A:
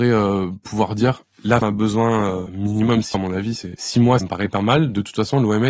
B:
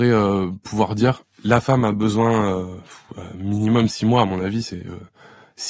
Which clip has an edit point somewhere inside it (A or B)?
A